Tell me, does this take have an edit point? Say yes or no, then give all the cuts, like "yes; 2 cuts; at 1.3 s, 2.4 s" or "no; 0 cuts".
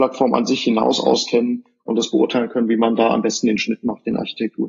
no; 0 cuts